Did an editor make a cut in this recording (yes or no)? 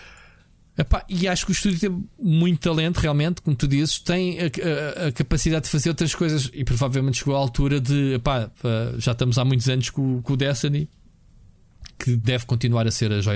no